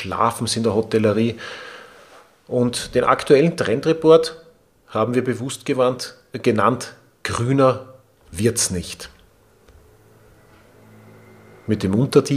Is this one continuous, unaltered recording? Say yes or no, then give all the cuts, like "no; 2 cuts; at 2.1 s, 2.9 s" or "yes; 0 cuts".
yes; 0 cuts